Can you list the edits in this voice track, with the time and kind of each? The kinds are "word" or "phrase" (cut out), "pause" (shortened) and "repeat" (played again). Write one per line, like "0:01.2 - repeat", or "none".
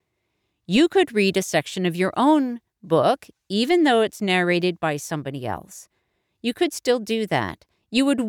none